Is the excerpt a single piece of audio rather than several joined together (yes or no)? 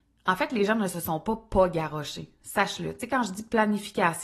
yes